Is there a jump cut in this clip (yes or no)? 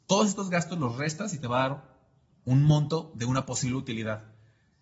no